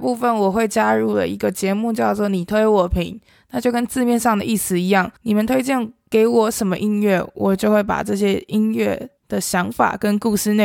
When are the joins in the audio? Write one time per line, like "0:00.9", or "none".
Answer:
0:05.2
0:09.2